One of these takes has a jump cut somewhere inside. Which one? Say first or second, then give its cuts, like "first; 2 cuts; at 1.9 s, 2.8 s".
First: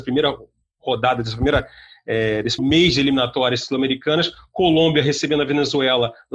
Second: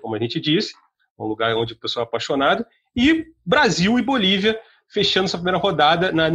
first; 1 cut; at 2.6 s